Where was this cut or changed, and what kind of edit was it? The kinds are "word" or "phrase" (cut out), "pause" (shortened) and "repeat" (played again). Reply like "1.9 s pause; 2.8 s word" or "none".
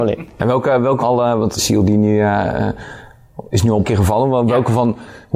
1.0 s word; 1.6 s word; 3.8 s word